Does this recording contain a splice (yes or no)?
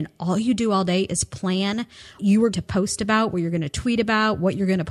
yes